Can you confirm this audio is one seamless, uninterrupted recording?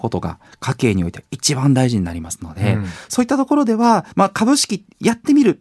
no; 1 cut; at 4.1 s

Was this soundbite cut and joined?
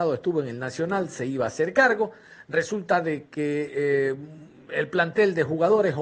no; 0 cuts

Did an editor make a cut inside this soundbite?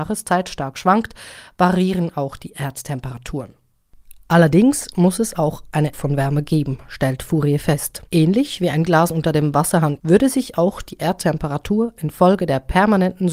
yes; 3 cuts; at 5.9 s, 8.1 s, 10.0 s

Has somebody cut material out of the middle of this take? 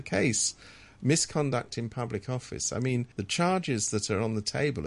yes; 1 cut; at 3.1 s

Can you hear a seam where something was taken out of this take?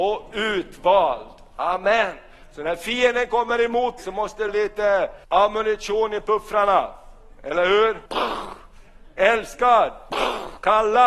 yes; 4 cuts; at 4.0 s, 4.5 s, 5.2 s, 8.1 s

